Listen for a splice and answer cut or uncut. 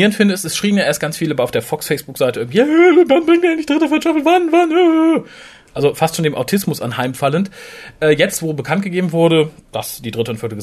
uncut